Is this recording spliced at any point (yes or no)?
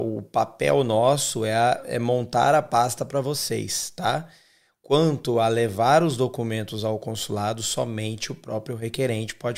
no